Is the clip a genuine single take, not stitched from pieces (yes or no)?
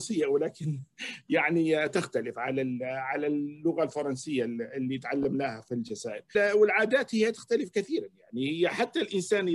yes